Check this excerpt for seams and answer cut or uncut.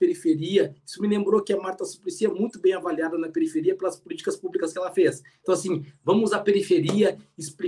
uncut